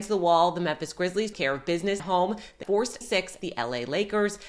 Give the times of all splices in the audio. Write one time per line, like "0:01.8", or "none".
0:01.3
0:02.0
0:02.6
0:03.0
0:03.4